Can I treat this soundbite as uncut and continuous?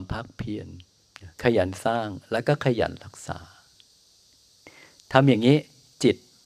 no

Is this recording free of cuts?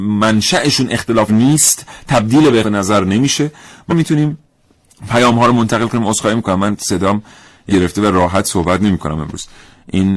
no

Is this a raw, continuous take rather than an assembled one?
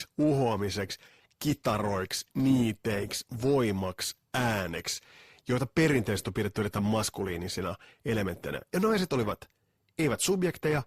yes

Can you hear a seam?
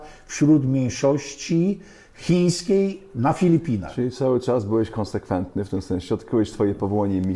no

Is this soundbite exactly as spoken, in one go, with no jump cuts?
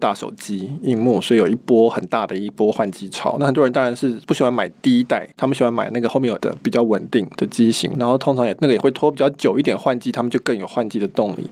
no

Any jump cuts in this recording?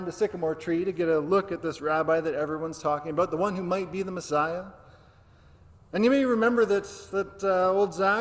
no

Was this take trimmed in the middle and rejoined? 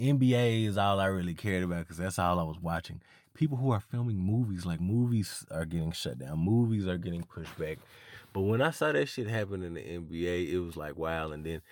no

